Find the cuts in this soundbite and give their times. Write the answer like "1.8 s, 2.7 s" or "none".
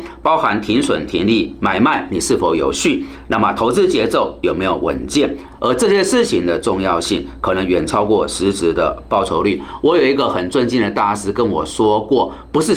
none